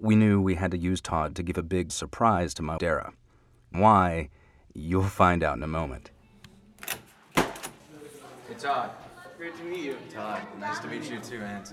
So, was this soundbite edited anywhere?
yes; 3 cuts; at 1.9 s, 2.8 s, 3.7 s

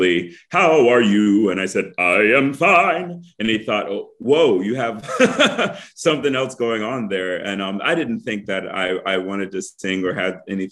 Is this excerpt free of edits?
yes; 0 cuts

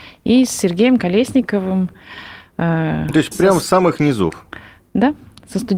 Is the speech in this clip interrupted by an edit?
yes; 2 cuts; at 3.3 s, 3.6 s

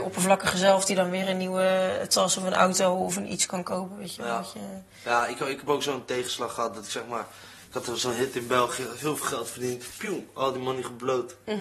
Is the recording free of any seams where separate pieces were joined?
yes; 0 cuts

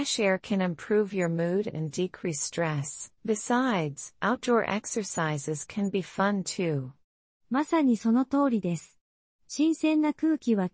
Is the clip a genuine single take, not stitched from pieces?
no; 2 cuts; at 3.2 s, 7.3 s

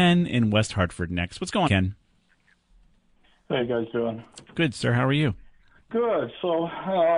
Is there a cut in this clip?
yes; 3 cuts; at 1.6 s, 3.6 s, 5.6 s

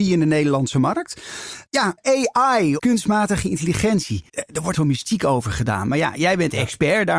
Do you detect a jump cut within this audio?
yes; 4 cuts; at 1.7 s, 2.8 s, 4.3 s, 4.7 s

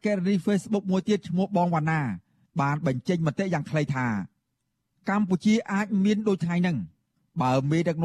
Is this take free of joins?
yes; 0 cuts

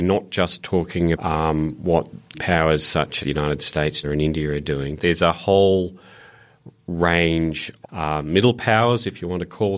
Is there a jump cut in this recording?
yes; 6 cuts; at 1.1 s, 2.3 s, 3.2 s, 4.0 s, 5.0 s, 7.8 s

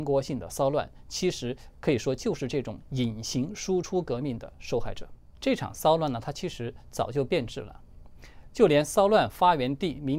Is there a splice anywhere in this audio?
no; 0 cuts

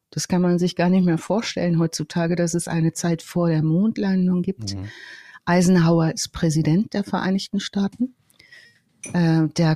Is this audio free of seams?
yes; 0 cuts

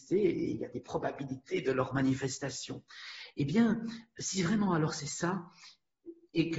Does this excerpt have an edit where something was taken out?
no; 0 cuts

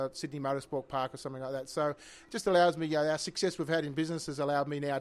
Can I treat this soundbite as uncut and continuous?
yes; 0 cuts

